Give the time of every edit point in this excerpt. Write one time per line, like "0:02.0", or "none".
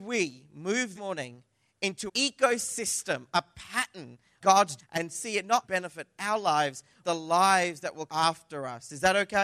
0:00.9
0:02.1
0:04.4
0:04.8
0:05.6
0:07.0
0:08.1